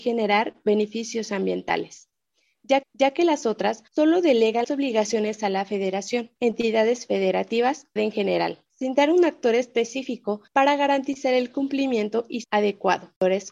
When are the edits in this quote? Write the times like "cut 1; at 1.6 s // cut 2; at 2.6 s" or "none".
cut 1; at 2.8 s // cut 2; at 3.9 s // cut 3; at 4.6 s // cut 4; at 6.4 s // cut 5; at 8.0 s // cut 6; at 8.7 s // cut 7; at 10.5 s // cut 8; at 12.4 s

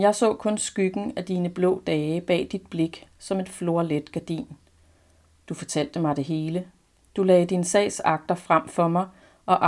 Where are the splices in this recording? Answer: none

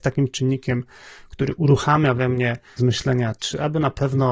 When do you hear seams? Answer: cut 1; at 2.8 s

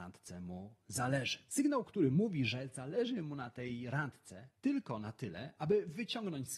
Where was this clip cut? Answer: cut 1; at 4.6 s

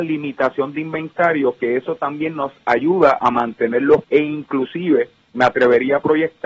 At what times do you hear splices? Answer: cut 1; at 4.0 s

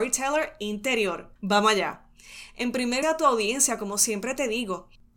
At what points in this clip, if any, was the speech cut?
cut 1; at 1.4 s // cut 2; at 3.0 s

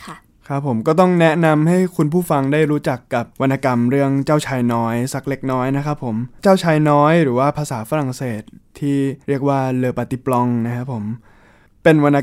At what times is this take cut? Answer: cut 1; at 3.3 s // cut 2; at 6.4 s // cut 3; at 9.2 s

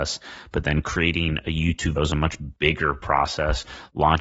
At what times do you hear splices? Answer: cut 1; at 2.0 s

